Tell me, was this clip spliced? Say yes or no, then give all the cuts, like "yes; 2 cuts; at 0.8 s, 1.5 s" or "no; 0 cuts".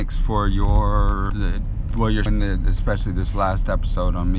yes; 2 cuts; at 1.3 s, 2.3 s